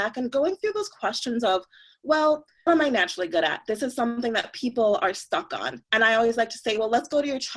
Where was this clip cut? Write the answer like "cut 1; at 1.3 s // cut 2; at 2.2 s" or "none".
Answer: cut 1; at 2.7 s

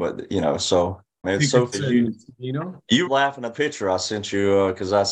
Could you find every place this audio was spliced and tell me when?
cut 1; at 1.2 s // cut 2; at 1.7 s // cut 3; at 3.1 s // cut 4; at 3.5 s

